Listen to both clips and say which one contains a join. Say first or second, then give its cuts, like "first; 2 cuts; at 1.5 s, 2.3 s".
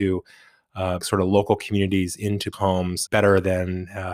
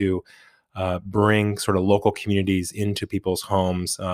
first; 3 cuts; at 1.0 s, 2.5 s, 3.1 s